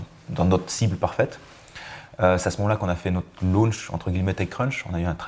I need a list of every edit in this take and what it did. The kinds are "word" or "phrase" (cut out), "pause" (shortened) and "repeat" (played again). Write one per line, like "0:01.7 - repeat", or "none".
none